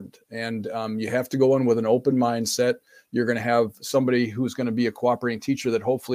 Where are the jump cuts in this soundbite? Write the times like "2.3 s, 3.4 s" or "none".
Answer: none